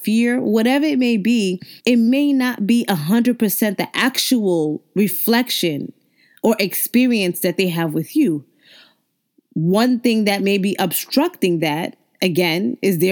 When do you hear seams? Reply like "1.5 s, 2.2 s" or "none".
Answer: 1.8 s